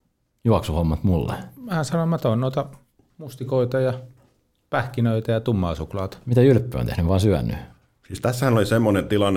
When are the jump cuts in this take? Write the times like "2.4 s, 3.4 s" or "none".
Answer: none